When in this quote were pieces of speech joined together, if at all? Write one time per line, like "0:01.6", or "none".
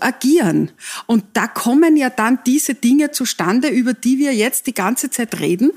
none